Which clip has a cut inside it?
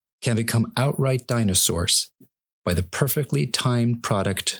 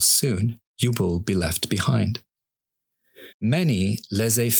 second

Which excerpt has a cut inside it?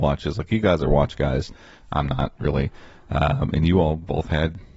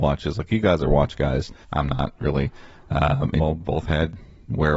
second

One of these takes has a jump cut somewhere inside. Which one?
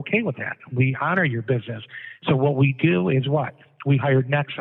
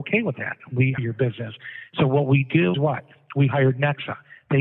second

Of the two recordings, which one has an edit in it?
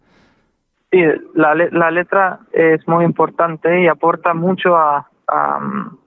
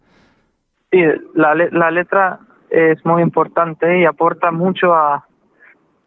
first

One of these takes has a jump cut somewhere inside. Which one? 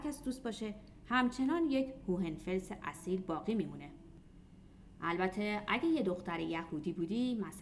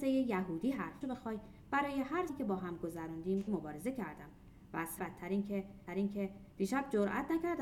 second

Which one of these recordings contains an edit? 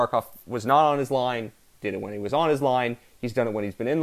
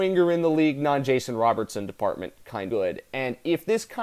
second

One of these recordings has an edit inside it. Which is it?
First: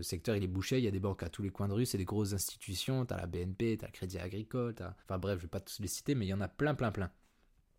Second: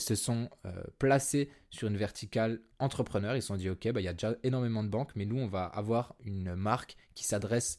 first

